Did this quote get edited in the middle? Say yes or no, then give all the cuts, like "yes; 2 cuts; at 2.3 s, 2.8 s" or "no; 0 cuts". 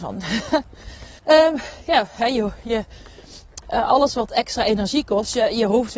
yes; 1 cut; at 1.2 s